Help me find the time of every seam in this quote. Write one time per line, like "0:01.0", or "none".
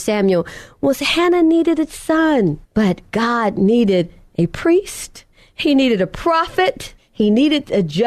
0:02.6
0:05.3
0:07.0